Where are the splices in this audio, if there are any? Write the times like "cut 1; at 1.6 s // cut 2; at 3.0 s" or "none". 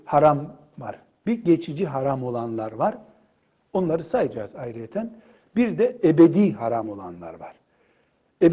none